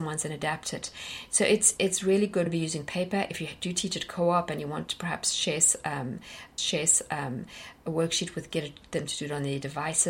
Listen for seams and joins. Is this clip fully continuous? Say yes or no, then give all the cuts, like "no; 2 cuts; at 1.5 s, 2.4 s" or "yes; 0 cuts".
no; 4 cuts; at 1.8 s, 2.5 s, 6.6 s, 8.5 s